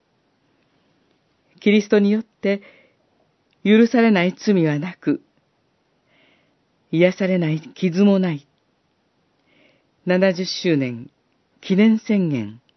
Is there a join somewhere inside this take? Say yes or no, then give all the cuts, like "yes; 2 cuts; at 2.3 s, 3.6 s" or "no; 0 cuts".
no; 0 cuts